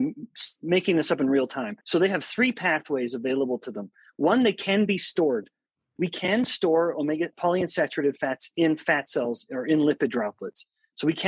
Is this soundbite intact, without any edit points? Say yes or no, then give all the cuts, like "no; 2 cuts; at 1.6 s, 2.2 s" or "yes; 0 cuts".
no; 2 cuts; at 1.8 s, 7.3 s